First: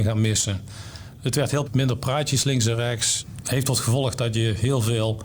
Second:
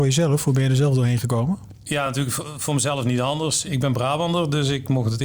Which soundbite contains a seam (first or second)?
first